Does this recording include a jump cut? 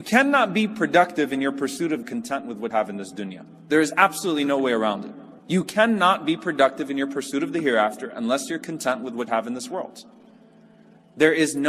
yes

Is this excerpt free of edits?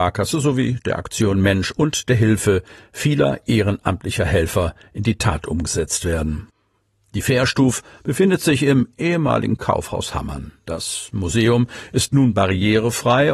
yes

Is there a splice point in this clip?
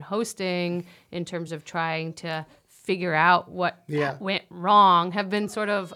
no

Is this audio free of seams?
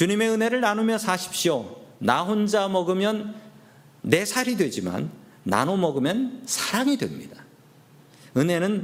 yes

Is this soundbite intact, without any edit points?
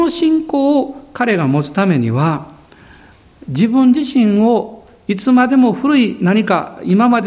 yes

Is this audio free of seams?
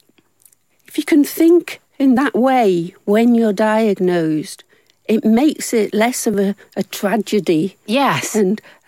yes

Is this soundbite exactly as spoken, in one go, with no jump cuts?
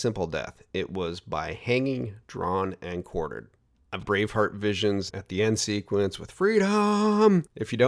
no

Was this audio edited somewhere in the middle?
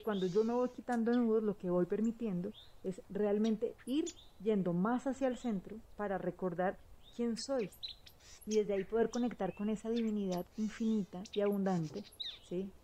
no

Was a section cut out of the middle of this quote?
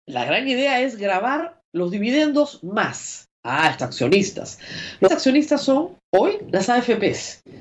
yes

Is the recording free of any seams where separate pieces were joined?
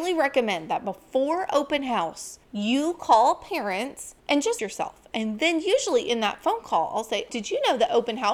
no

